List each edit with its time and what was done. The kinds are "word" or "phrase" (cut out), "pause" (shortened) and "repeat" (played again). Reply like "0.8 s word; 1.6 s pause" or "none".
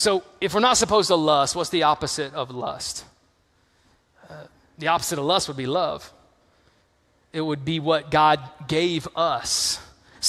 none